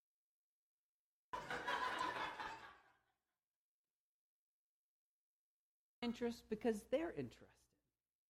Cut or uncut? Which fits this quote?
cut